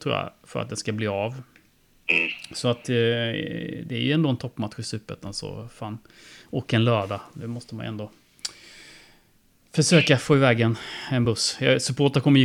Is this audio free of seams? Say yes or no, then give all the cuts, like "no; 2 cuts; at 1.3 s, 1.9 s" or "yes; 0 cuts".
yes; 0 cuts